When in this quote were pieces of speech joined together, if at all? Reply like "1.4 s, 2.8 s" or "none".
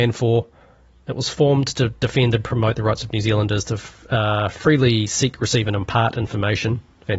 none